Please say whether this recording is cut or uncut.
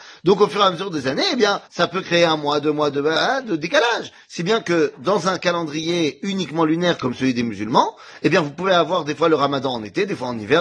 cut